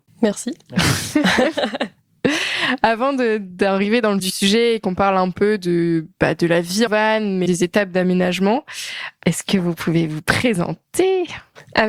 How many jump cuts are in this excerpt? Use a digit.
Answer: 3